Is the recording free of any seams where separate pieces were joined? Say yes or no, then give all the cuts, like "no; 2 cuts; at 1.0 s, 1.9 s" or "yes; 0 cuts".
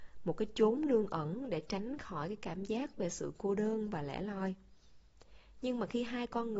yes; 0 cuts